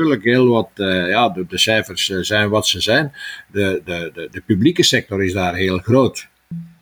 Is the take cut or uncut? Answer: uncut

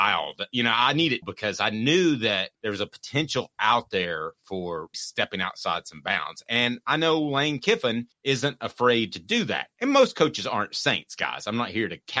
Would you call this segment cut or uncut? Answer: cut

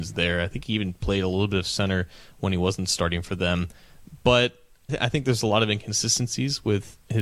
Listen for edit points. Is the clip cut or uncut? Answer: cut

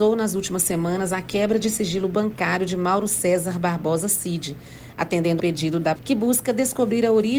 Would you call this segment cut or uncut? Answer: cut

